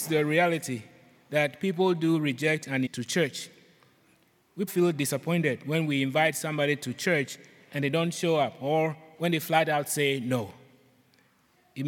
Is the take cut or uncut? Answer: cut